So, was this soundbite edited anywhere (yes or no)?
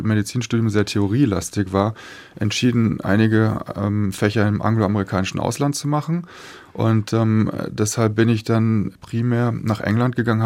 no